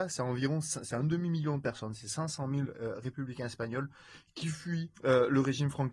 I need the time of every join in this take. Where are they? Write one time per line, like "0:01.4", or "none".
0:04.9

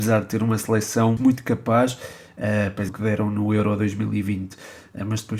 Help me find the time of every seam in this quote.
0:01.2
0:02.9

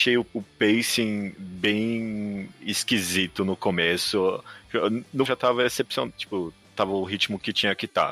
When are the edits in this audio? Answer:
0:05.3

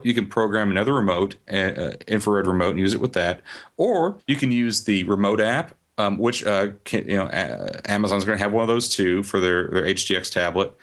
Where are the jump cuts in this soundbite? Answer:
0:04.2

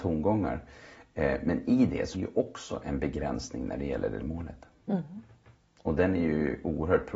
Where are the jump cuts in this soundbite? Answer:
0:02.1
0:04.2

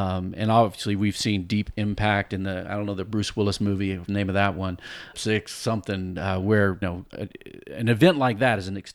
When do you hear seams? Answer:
0:04.1
0:05.1
0:06.8

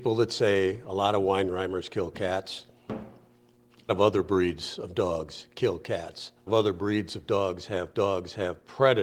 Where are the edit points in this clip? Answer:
0:03.9
0:06.5
0:07.9

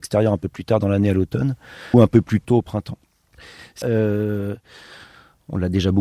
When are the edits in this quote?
0:01.9
0:03.8

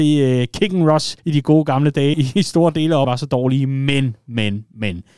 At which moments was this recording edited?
0:01.2
0:02.1
0:03.0

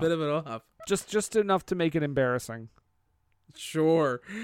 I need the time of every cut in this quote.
none

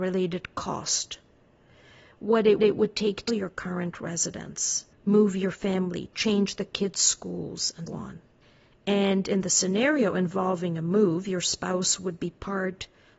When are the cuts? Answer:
0:02.6
0:03.3
0:04.9
0:07.9

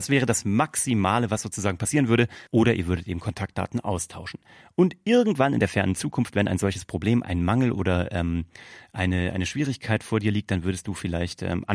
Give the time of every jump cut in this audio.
0:02.5

